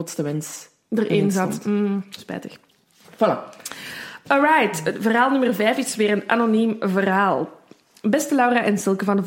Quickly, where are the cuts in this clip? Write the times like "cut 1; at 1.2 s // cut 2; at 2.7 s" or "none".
none